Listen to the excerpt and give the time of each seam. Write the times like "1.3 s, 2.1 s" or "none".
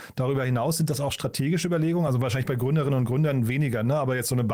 none